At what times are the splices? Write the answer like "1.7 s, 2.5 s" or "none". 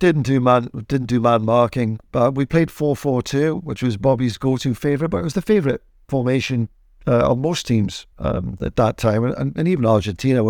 8.1 s